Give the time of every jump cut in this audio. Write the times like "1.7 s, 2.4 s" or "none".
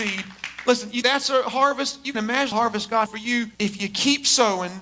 1.0 s, 2.1 s, 2.5 s, 3.1 s, 3.5 s